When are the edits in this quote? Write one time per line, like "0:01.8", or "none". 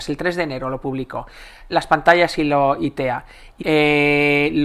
0:01.7
0:03.6